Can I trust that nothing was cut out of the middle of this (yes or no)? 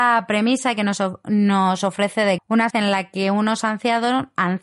no